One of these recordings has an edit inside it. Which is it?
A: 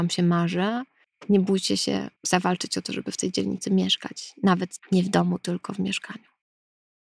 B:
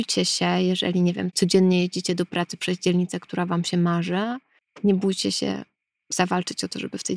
A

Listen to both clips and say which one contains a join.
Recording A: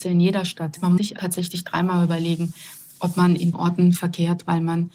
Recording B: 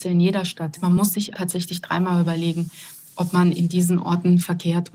A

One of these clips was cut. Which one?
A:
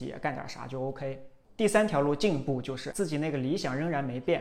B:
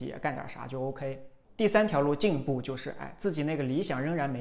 A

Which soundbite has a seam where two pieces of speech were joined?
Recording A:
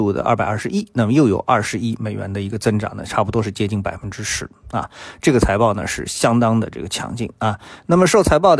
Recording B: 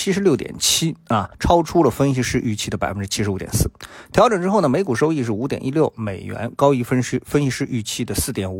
B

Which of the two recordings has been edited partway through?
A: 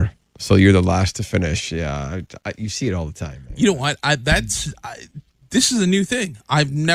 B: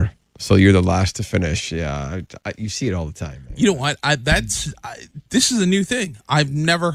B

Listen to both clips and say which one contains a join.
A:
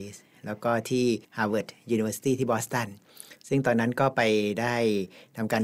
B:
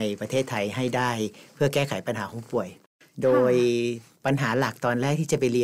A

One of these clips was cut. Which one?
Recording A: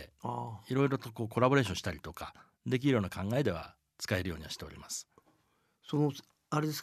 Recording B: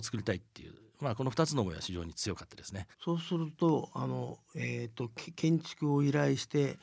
B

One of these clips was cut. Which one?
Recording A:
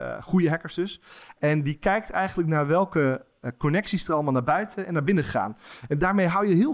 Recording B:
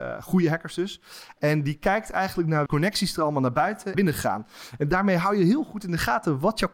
B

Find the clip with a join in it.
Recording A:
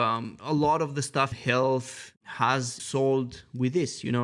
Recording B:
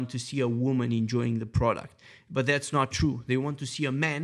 A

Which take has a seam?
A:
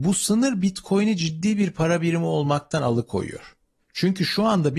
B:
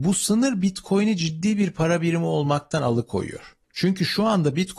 B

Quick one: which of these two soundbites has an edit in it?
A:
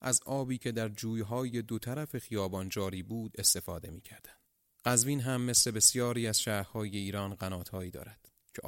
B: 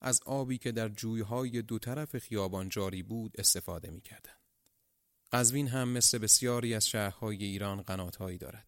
A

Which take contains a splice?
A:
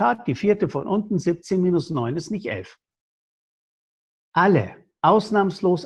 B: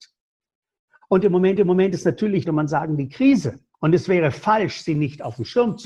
B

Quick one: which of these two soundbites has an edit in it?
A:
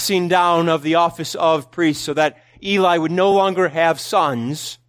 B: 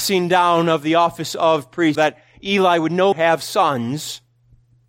B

